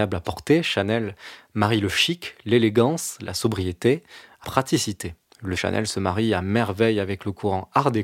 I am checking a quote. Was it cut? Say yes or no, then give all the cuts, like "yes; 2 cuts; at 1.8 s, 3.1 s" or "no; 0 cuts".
yes; 2 cuts; at 4.4 s, 5.6 s